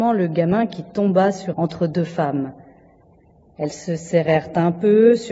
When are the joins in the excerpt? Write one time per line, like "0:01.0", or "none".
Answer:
0:01.5